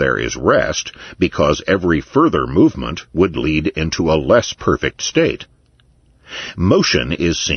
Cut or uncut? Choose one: uncut